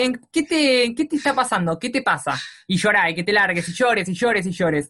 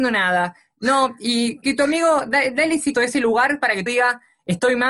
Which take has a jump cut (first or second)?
second